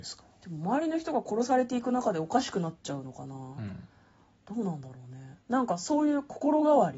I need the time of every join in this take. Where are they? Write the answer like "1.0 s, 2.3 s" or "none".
none